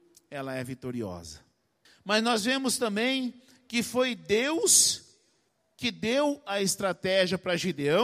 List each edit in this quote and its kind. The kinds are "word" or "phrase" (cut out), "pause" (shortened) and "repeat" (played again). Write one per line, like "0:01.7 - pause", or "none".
none